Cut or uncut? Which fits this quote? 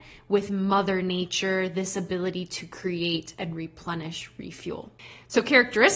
uncut